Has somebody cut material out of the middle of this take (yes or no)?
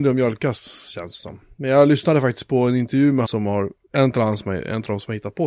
yes